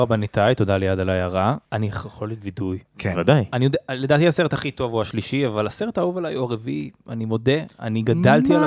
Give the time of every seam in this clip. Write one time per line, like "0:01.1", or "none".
0:01.6
0:02.9

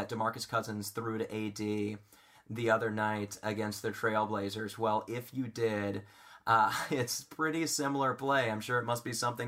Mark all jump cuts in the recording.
none

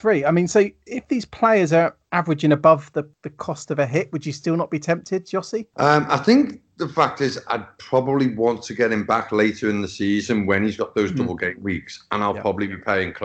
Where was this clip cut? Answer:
none

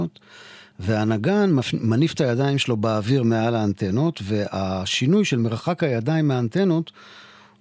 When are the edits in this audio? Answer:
none

